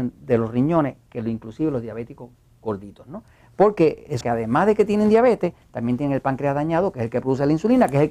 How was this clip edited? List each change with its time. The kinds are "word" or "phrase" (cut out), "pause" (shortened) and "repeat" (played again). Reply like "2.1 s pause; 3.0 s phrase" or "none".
4.2 s word